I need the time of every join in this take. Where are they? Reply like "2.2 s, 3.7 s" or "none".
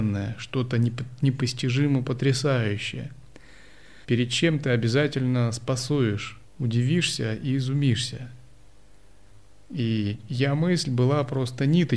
4.0 s, 6.5 s, 9.5 s